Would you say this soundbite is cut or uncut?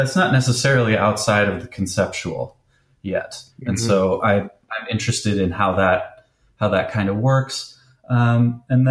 cut